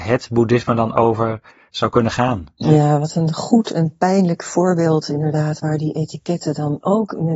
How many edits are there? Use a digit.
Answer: 1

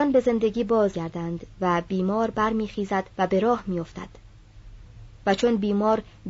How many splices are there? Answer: 2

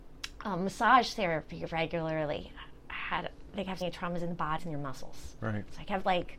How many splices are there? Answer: 2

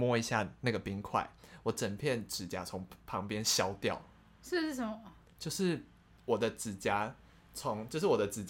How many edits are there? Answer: 0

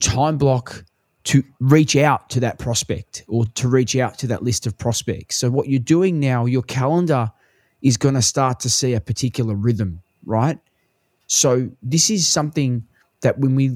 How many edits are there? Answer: 0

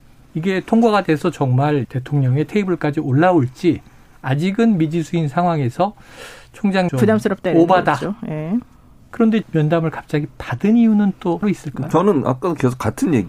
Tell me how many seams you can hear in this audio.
4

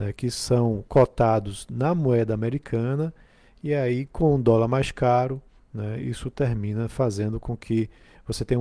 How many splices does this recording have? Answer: 0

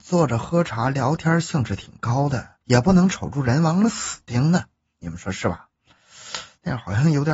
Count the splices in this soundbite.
1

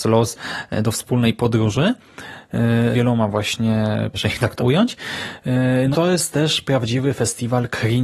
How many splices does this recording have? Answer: 4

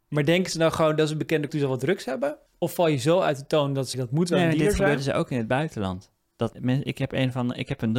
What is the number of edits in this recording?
4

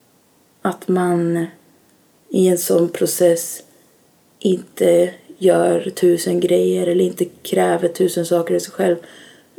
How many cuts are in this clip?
0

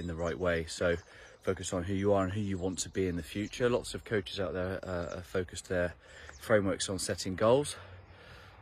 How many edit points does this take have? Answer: 0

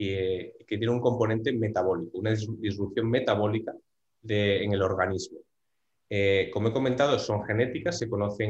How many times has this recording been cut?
0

